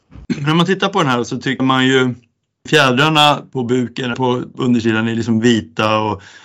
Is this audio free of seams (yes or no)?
no